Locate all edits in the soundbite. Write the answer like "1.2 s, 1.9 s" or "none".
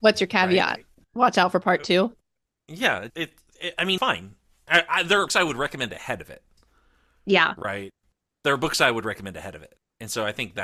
3.1 s, 4.0 s, 5.3 s